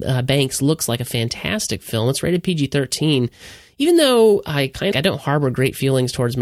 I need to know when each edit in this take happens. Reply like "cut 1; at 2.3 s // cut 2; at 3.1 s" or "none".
cut 1; at 4.9 s